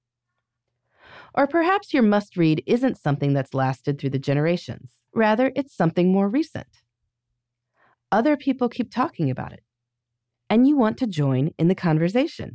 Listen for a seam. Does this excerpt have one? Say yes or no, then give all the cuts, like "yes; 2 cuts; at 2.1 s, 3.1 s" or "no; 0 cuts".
yes; 1 cut; at 5.1 s